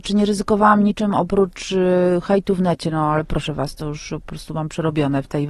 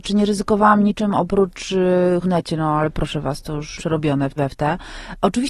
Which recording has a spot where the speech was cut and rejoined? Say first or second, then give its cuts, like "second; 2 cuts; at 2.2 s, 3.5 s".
second; 3 cuts; at 2.2 s, 3.8 s, 4.4 s